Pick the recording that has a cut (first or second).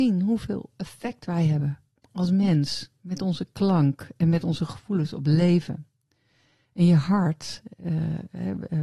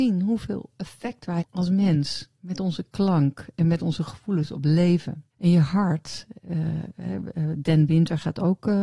second